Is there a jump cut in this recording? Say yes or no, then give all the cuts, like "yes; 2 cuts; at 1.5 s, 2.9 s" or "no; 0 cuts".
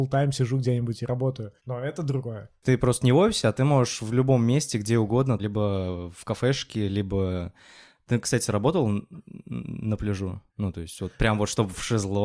yes; 3 cuts; at 1.6 s, 5.4 s, 10.5 s